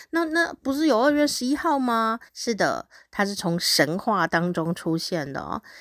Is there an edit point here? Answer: yes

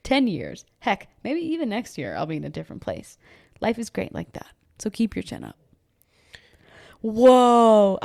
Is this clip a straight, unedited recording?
yes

